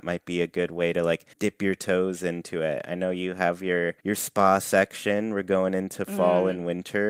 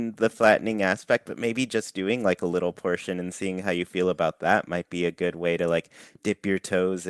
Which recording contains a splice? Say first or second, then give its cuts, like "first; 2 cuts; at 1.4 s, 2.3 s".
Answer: first; 2 cuts; at 1.3 s, 4.0 s